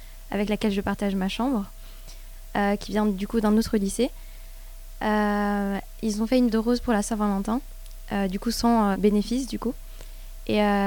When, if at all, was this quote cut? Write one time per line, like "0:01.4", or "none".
0:06.5
0:08.9